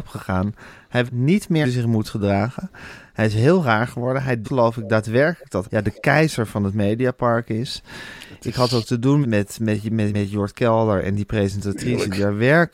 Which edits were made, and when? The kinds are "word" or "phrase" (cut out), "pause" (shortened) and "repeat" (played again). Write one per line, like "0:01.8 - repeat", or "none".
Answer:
0:01.1 - word
0:01.6 - word
0:04.4 - word
0:05.6 - word
0:09.2 - word
0:10.1 - word